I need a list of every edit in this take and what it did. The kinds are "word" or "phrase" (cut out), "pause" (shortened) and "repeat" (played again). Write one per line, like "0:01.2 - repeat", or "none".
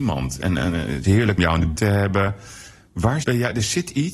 0:01.0 - word
0:01.4 - word
0:01.8 - word
0:03.2 - word